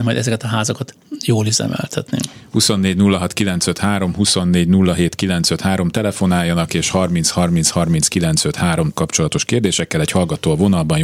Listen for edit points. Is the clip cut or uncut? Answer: cut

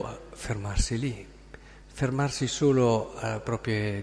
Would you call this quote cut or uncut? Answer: uncut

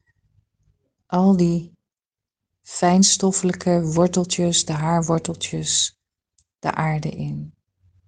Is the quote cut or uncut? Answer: uncut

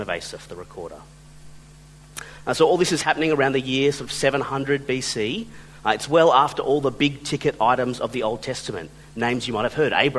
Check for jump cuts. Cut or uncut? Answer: uncut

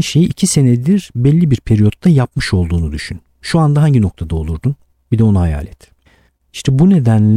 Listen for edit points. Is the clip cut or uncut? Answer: uncut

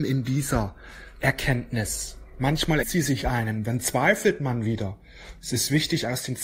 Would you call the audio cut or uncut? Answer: cut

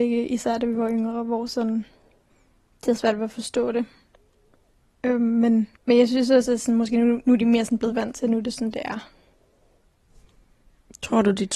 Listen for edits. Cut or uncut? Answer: cut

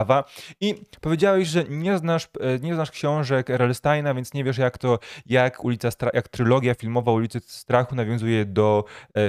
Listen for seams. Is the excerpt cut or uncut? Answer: uncut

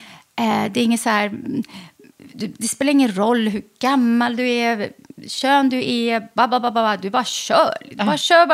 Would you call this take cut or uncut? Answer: uncut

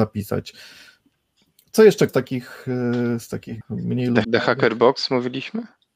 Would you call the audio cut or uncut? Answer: cut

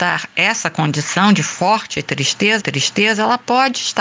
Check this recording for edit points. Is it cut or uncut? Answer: cut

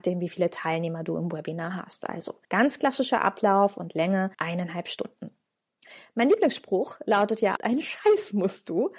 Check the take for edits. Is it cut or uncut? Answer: cut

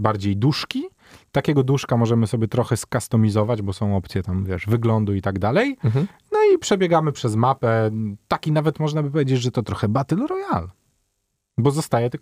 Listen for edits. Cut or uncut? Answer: uncut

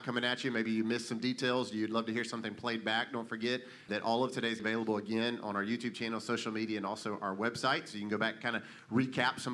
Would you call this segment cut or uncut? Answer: cut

